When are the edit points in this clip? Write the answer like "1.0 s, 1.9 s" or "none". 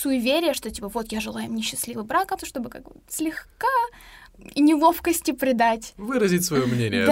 2.4 s